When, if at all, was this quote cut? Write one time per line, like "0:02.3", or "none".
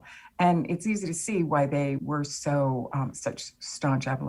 0:02.0